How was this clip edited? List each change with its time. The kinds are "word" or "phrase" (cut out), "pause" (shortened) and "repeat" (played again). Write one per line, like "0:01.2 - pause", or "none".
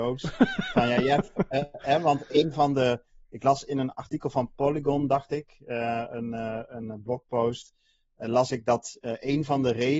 none